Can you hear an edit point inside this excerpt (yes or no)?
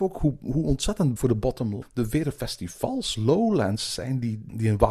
yes